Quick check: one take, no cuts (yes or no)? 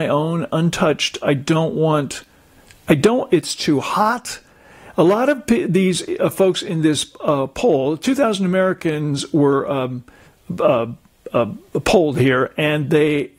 yes